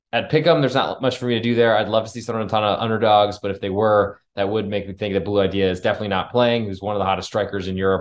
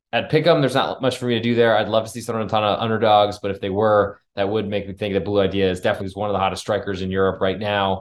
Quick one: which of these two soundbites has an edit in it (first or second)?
second